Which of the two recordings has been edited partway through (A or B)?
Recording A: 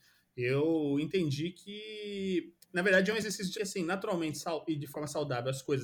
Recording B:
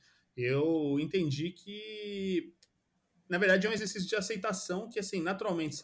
A